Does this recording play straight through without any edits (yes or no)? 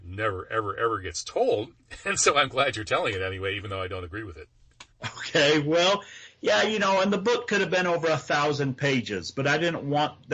no